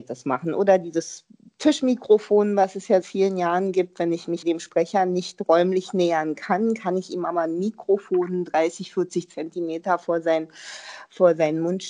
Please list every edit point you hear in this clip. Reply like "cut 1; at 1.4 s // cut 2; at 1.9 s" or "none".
cut 1; at 3.0 s // cut 2; at 4.4 s